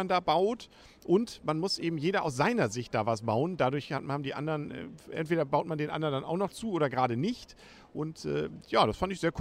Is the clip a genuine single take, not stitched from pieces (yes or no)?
yes